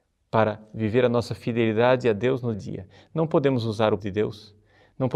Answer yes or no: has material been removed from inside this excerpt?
yes